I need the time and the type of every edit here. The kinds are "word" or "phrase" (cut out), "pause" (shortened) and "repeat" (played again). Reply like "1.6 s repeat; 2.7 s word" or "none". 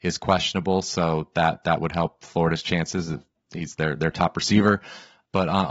none